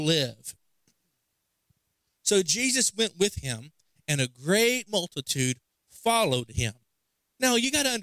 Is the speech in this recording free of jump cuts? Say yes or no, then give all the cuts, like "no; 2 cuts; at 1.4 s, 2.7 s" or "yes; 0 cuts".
yes; 0 cuts